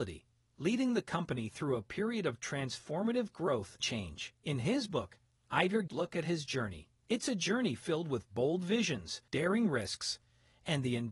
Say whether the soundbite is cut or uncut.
cut